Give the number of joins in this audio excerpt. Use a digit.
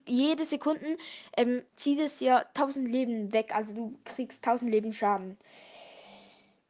1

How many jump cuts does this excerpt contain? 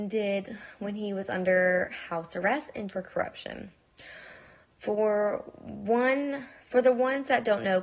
1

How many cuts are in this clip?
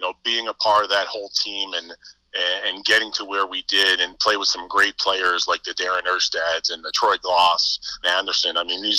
1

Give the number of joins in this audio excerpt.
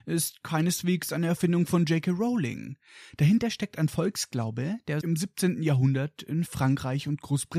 1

